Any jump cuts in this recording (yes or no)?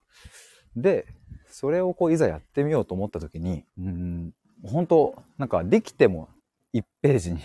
yes